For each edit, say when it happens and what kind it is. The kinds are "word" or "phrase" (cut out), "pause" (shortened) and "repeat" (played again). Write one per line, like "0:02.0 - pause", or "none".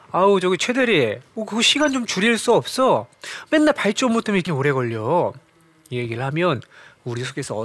0:04.5 - word

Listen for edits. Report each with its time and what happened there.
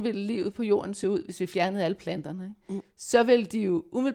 none

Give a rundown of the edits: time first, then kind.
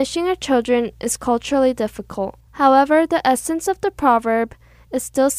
0:02.5 - pause

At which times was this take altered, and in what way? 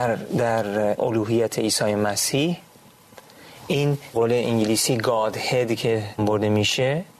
0:01.0 - word
0:04.1 - word
0:06.2 - word

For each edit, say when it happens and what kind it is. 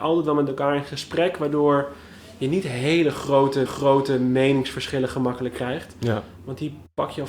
0:03.7 - repeat

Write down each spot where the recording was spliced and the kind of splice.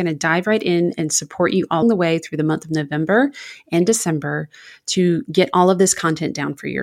0:01.8 - word

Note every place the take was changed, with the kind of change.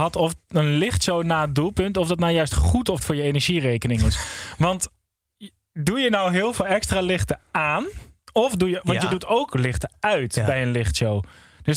0:03.0 - word

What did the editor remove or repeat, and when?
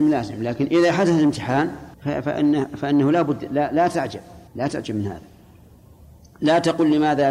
0:01.9 - pause
0:04.5 - pause

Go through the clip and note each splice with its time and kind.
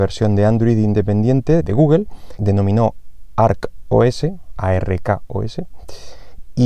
0:01.6 - word
0:02.4 - phrase

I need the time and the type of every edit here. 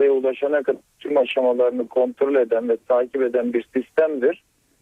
none

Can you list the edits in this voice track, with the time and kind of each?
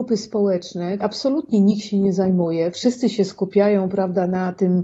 0:01.0 - word

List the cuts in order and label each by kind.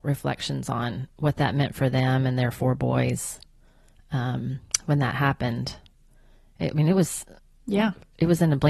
none

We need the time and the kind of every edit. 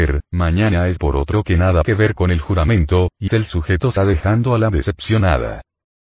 0:01.0 - word
0:01.8 - word
0:03.3 - word
0:04.0 - word
0:04.7 - word

